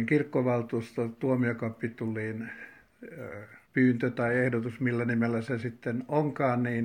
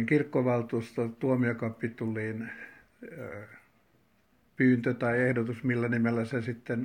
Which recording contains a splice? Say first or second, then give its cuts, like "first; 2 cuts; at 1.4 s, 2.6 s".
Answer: first; 1 cut; at 3.6 s